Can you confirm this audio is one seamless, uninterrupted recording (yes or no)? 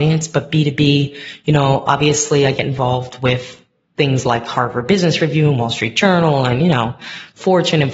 yes